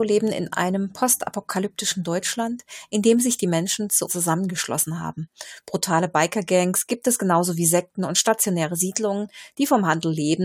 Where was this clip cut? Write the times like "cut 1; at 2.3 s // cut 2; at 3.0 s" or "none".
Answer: cut 1; at 4.1 s